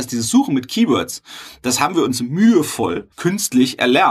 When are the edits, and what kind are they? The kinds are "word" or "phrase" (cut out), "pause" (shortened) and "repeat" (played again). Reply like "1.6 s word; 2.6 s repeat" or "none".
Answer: 3.1 s pause